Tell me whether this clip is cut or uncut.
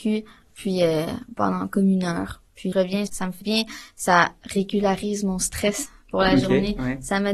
cut